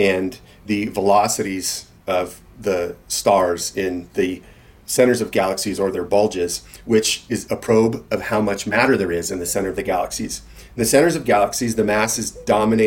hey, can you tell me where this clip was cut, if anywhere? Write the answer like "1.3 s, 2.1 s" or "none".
none